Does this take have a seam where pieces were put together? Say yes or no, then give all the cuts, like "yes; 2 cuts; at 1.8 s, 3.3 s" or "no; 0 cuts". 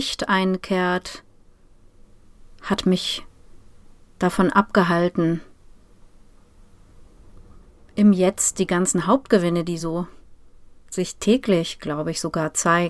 no; 0 cuts